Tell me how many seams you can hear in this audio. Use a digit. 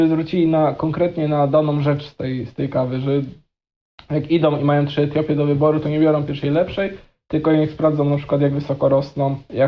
0